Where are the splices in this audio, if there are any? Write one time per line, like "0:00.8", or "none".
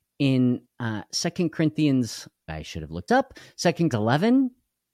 0:02.5
0:03.1
0:03.9